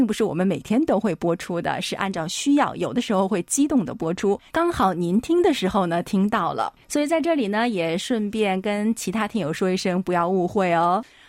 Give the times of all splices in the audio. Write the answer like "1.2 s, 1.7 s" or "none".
4.5 s, 6.8 s